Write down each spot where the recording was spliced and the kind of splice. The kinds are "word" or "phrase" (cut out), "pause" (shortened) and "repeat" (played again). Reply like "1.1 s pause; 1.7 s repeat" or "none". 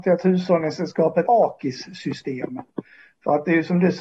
1.2 s phrase